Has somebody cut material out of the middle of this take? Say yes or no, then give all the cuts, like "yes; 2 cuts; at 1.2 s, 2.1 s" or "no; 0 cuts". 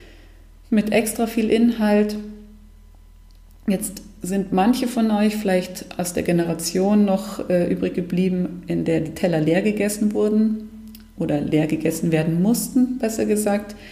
no; 0 cuts